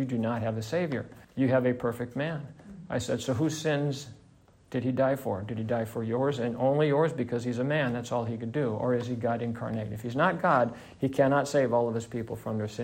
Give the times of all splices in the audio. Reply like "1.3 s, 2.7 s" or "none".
1.2 s

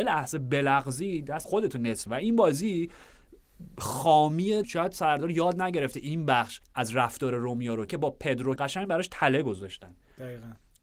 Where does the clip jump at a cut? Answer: 1.4 s, 2.1 s, 4.6 s, 6.6 s, 7.9 s, 8.6 s

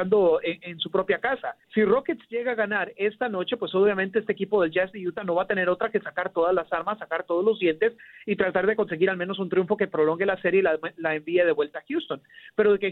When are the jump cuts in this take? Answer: 1.6 s

